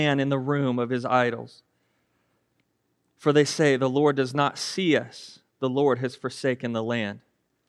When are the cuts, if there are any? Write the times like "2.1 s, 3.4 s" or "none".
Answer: none